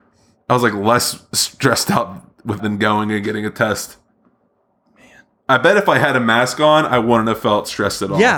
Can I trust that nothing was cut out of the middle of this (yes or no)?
no